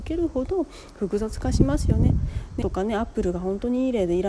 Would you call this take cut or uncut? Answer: cut